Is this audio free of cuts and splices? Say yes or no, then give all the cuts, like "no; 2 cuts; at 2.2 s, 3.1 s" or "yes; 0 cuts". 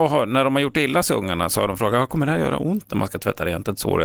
yes; 0 cuts